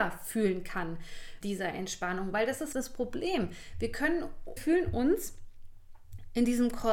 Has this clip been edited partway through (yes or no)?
yes